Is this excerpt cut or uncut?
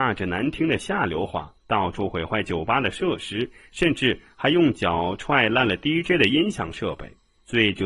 cut